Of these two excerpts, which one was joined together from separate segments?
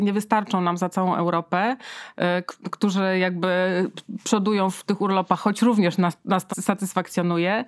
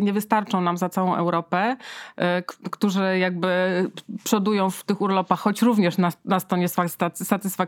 first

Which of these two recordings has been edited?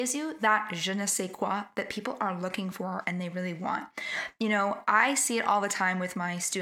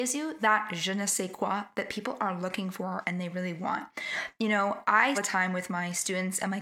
second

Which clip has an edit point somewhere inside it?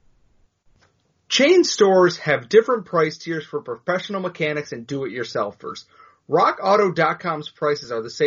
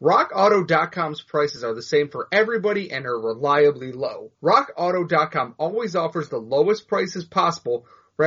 second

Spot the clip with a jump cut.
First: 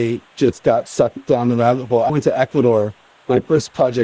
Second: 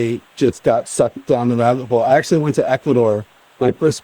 first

